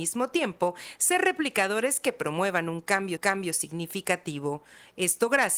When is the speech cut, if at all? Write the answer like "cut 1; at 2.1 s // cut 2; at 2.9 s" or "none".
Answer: cut 1; at 3.2 s